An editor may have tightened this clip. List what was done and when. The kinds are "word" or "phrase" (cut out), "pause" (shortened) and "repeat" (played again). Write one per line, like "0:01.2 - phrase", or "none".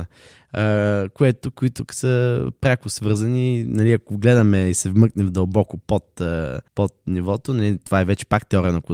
0:06.7 - pause